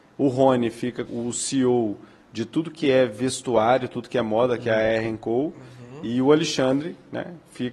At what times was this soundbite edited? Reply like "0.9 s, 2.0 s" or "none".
1.1 s

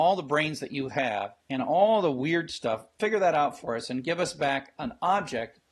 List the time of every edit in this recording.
1.4 s

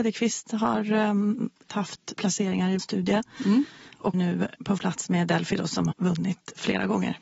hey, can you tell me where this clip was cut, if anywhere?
1.7 s, 2.1 s, 2.8 s, 4.1 s, 4.8 s, 5.9 s

